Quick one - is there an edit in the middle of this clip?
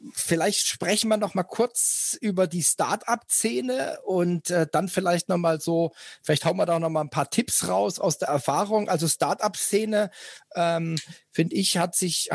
no; 0 cuts

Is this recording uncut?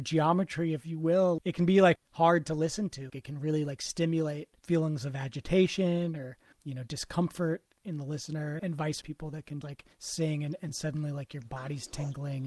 no; 9 cuts; at 1.4 s, 2.0 s, 3.1 s, 4.6 s, 6.5 s, 8.6 s, 9.0 s, 9.6 s, 9.9 s

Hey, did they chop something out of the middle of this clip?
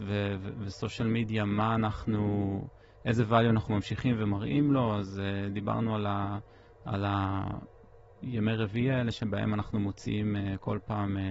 no; 0 cuts

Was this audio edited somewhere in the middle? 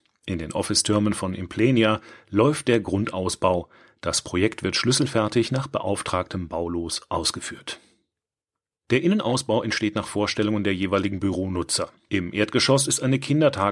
no; 0 cuts

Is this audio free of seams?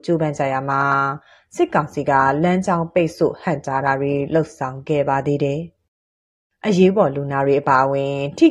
yes; 0 cuts

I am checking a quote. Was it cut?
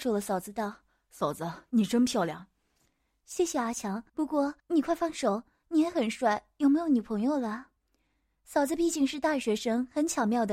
yes; 3 cuts; at 4.1 s, 4.6 s, 7.8 s

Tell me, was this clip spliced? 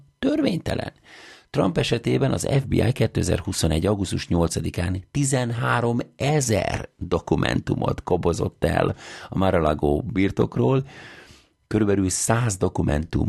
no; 0 cuts

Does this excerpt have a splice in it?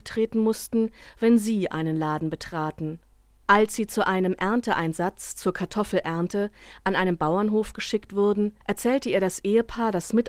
yes; 1 cut; at 8.6 s

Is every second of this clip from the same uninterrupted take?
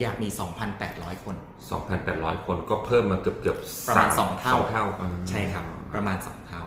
yes; 0 cuts

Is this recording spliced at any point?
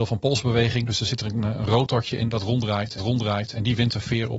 yes; 1 cut; at 3.0 s

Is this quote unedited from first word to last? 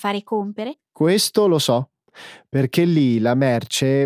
yes; 0 cuts

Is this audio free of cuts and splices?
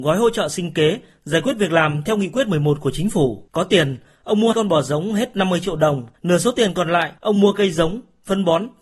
no; 4 cuts; at 3.5 s, 4.5 s, 6.1 s, 7.2 s

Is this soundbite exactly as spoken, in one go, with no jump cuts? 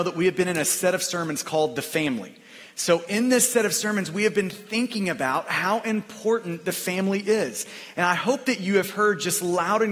yes; 0 cuts

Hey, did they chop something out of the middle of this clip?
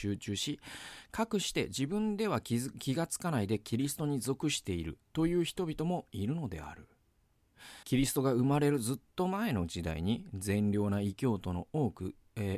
yes; 1 cut; at 7.8 s

